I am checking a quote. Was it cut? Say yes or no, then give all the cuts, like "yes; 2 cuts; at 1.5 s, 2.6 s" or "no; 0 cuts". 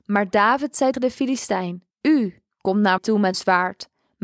yes; 4 cuts; at 0.9 s, 1.9 s, 3.0 s, 3.3 s